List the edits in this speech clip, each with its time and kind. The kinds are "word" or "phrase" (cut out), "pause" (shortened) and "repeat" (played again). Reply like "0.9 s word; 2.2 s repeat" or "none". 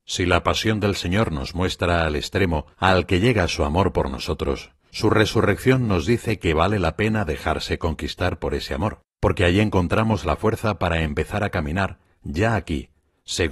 2.7 s pause; 4.8 s pause; 9.1 s pause